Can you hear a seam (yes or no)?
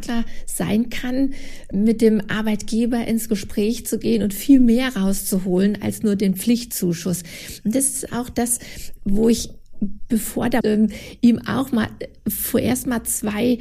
yes